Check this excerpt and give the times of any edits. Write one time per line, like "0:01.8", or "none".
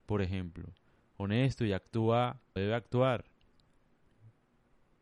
0:02.6

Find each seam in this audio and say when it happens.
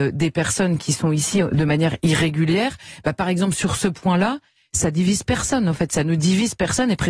none

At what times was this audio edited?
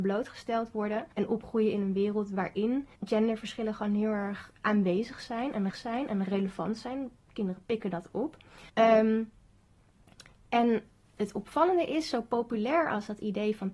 0:01.1
0:03.0
0:05.7
0:08.7
0:11.2

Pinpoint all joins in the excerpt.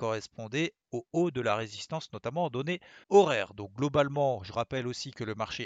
0:03.0

